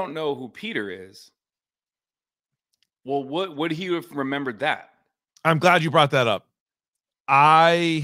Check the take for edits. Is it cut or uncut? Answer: uncut